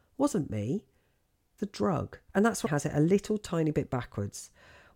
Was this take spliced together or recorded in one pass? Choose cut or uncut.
cut